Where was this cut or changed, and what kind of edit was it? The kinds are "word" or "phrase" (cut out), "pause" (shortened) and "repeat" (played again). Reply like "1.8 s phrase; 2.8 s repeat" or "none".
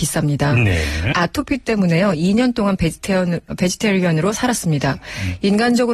1.1 s phrase; 3.5 s word